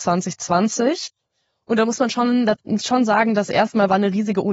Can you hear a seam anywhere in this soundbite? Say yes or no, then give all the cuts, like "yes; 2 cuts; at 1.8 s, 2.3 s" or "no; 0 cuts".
no; 0 cuts